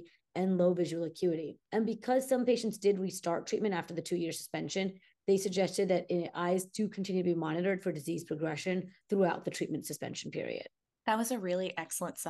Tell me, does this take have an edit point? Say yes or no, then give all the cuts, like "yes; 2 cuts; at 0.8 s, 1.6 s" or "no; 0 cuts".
yes; 3 cuts; at 1.7 s, 9.0 s, 10.8 s